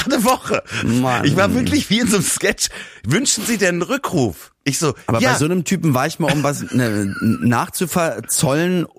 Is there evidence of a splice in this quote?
no; 0 cuts

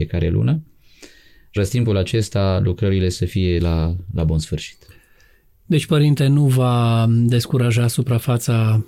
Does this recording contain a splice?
yes; 2 cuts; at 1.6 s, 3.6 s

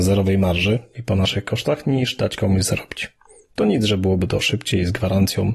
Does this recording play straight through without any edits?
yes; 0 cuts

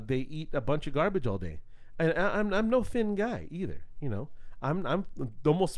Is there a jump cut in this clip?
no; 0 cuts

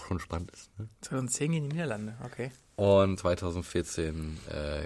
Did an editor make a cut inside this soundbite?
yes; 1 cut; at 3.2 s

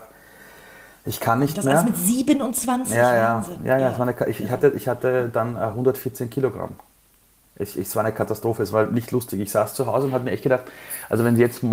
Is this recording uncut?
yes; 0 cuts

